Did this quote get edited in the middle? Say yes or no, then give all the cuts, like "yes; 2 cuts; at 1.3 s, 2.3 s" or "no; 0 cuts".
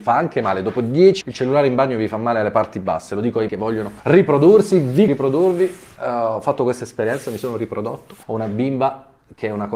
yes; 5 cuts; at 1.2 s, 3.5 s, 4.0 s, 5.1 s, 8.2 s